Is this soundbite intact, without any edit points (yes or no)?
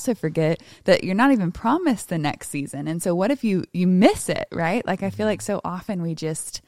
yes